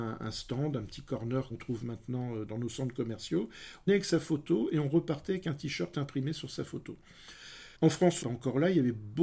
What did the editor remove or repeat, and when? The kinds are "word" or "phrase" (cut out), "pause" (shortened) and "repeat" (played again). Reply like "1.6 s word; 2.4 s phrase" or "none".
1.5 s word; 2.5 s word; 3.9 s word; 7.8 s pause; 8.2 s phrase